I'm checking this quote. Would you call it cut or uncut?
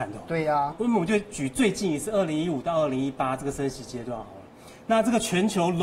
uncut